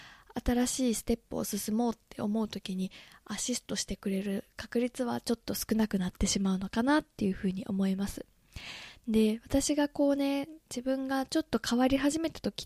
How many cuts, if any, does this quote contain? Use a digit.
0